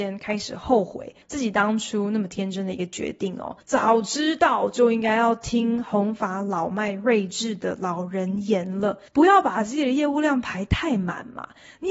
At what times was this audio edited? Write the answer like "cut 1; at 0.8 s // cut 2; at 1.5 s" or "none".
cut 1; at 1.2 s // cut 2; at 3.6 s // cut 3; at 9.1 s